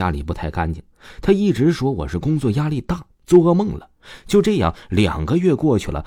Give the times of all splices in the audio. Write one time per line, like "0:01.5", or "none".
0:03.1